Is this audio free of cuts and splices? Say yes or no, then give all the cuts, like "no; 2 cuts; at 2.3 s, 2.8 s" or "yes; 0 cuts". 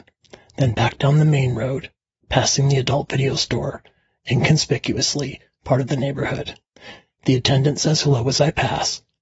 yes; 0 cuts